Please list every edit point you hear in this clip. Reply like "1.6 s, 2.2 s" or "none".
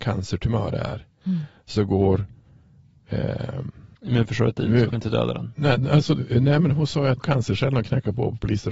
3.9 s, 4.9 s, 7.2 s